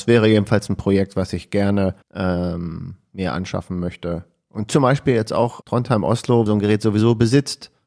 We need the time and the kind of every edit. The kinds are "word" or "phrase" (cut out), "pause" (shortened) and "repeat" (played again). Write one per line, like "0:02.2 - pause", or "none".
0:02.0 - pause
0:05.6 - word
0:06.5 - phrase